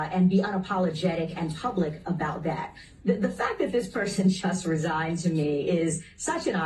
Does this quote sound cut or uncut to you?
uncut